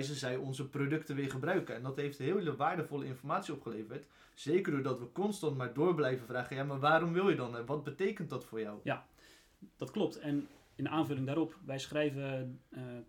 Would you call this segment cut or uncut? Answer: cut